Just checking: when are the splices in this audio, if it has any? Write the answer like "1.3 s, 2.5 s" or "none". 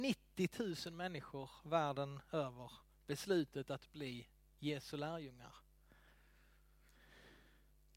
none